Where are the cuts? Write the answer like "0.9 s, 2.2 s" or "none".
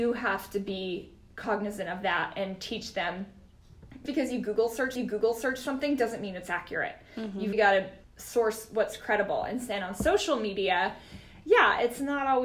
4.1 s, 5.0 s, 7.5 s, 8.0 s